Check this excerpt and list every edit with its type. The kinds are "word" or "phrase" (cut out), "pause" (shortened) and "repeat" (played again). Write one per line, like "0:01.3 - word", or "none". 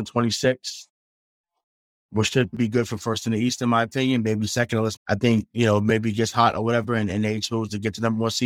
0:05.0 - word